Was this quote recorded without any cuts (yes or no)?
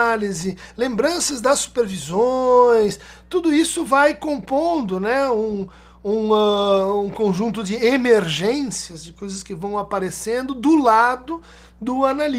yes